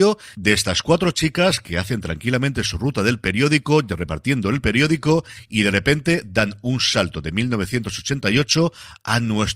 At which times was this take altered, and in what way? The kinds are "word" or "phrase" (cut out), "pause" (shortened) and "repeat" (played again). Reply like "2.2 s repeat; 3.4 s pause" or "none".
none

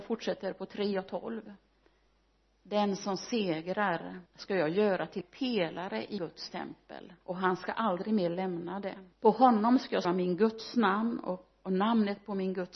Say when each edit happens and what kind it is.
4.3 s pause; 5.2 s word; 6.2 s word; 7.2 s pause; 9.1 s pause; 10.0 s word

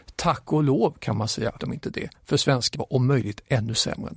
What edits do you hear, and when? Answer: 1.6 s word; 2.7 s word

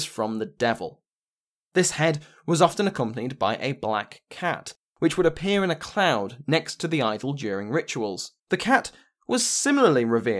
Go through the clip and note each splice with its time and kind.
8.4 s pause

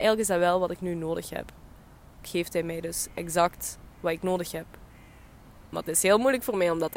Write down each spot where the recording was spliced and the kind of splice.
2.2 s word; 5.6 s pause

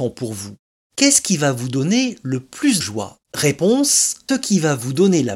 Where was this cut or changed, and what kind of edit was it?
2.8 s word; 3.2 s pause; 4.3 s word

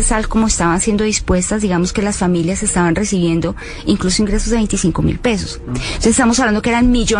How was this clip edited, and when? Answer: none

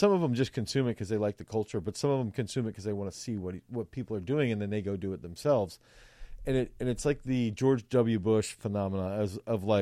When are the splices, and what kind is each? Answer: none

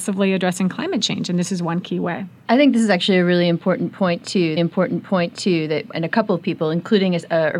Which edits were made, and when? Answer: 4.6 s repeat

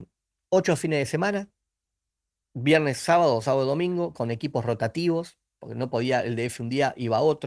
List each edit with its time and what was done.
none

